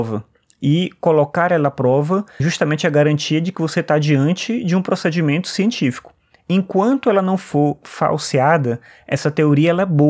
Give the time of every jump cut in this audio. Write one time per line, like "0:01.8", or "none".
0:02.4